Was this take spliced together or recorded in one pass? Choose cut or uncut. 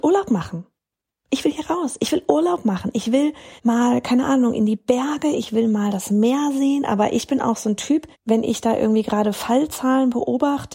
cut